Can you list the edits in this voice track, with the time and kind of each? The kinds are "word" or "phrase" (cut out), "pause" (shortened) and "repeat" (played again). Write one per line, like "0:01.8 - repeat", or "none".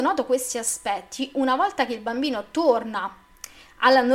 none